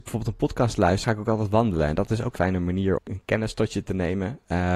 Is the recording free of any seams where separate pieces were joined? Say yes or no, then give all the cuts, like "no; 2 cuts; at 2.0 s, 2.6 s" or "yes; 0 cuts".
no; 3 cuts; at 1.0 s, 2.4 s, 3.0 s